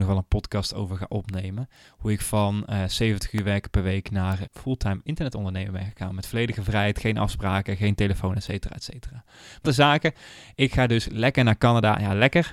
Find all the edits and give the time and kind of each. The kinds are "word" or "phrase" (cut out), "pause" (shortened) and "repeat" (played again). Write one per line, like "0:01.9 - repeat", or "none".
0:04.4 - word
0:09.6 - phrase